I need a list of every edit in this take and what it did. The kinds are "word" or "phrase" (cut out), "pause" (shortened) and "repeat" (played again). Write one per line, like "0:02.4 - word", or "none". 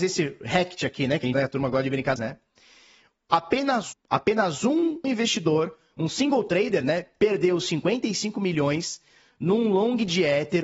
0:01.3 - word
0:02.2 - phrase
0:03.9 - word
0:05.0 - phrase